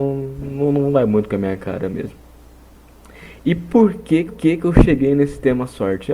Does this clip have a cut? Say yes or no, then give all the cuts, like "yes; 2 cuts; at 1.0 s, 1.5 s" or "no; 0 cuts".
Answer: yes; 1 cut; at 4.3 s